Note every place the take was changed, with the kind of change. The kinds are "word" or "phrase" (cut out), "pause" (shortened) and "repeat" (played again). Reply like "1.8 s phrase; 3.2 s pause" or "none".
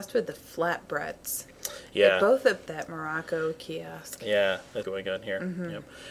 2.7 s phrase; 4.8 s phrase